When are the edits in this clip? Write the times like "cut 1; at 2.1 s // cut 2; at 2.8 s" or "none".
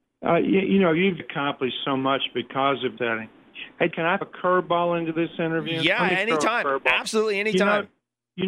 cut 1; at 1.2 s // cut 2; at 3.0 s // cut 3; at 3.9 s // cut 4; at 4.2 s